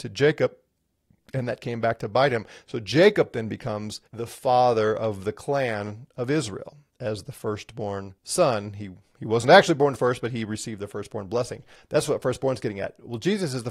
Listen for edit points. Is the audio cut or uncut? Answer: cut